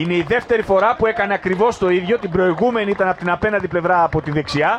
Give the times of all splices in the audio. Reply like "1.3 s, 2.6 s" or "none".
none